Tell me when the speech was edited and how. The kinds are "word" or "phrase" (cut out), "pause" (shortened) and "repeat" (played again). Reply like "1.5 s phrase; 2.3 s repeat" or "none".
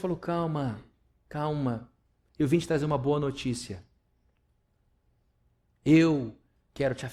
none